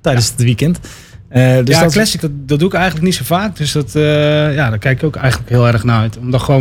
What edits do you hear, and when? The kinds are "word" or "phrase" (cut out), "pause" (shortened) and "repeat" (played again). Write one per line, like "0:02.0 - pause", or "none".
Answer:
0:02.2 - word